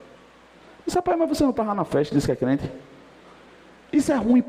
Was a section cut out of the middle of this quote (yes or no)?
no